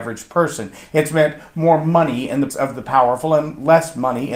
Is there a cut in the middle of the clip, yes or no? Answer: yes